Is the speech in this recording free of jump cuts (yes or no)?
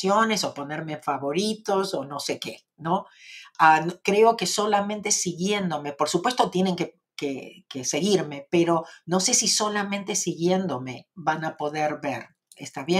yes